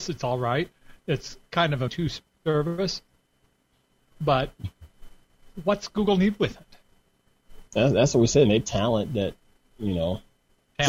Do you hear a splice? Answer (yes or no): yes